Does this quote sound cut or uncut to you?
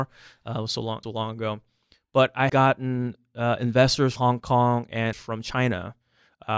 cut